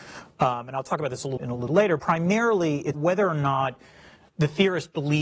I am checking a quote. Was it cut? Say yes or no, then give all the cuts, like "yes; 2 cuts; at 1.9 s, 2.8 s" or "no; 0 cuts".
yes; 5 cuts; at 1.4 s, 1.7 s, 2.0 s, 2.9 s, 4.3 s